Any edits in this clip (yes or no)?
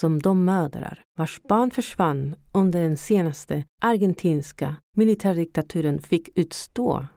no